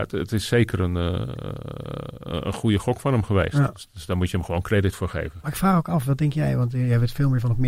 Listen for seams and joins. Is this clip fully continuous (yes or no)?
yes